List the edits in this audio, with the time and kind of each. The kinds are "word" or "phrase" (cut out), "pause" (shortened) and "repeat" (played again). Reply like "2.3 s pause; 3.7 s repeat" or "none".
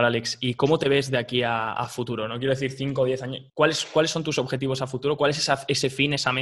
3.5 s pause